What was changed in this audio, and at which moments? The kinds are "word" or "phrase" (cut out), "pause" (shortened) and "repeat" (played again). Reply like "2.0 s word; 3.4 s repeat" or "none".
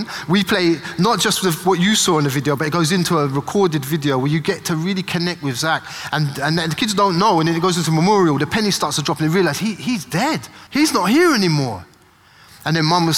10.7 s pause